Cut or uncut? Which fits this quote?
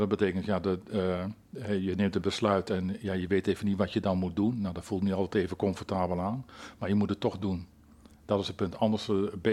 uncut